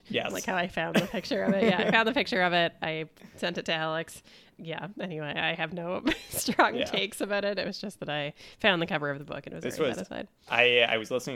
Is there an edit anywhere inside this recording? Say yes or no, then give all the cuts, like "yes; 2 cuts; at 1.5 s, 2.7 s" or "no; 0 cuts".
no; 0 cuts